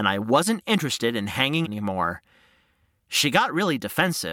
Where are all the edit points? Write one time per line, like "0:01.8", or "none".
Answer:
0:01.6